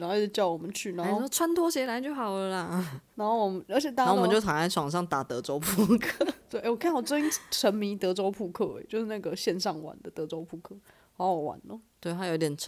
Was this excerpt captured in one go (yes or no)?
yes